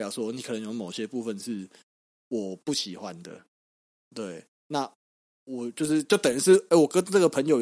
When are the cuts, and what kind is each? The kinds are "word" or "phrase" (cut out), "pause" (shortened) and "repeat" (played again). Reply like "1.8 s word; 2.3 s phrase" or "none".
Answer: none